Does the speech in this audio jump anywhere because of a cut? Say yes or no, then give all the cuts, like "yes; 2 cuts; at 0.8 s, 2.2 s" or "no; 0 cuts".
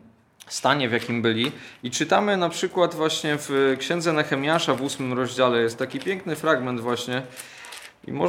no; 0 cuts